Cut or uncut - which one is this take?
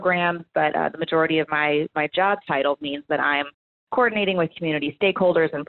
uncut